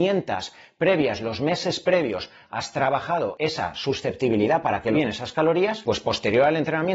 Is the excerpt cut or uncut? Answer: cut